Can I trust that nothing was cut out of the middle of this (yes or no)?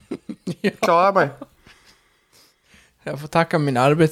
yes